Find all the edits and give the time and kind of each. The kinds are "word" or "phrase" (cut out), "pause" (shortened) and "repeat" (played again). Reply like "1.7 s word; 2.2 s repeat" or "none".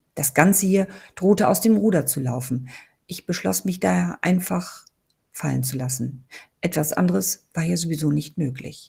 none